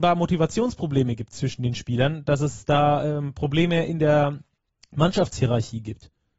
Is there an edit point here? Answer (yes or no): no